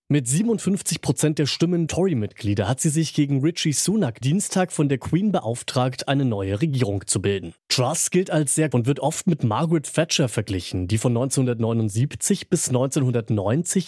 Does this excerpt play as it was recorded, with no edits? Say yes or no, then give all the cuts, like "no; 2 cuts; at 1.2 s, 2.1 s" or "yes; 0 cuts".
no; 4 cuts; at 1.9 s, 4.2 s, 7.6 s, 8.7 s